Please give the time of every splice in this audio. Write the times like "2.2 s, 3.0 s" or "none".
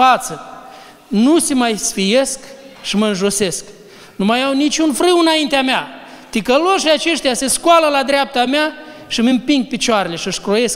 none

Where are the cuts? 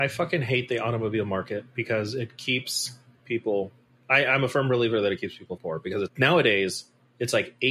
5.6 s, 6.1 s

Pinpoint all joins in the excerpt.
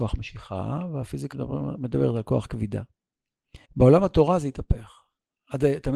1.3 s, 3.6 s

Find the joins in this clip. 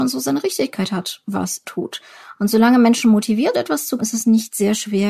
1.6 s, 3.5 s, 4.0 s

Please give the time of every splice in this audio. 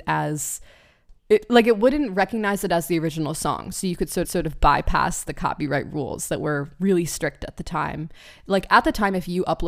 1.2 s, 4.2 s

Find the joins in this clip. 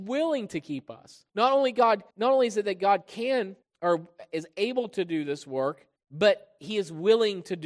1.3 s, 2.1 s, 3.6 s, 6.0 s

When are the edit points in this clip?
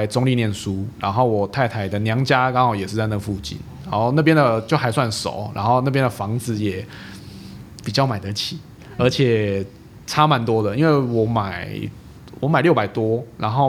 9.0 s

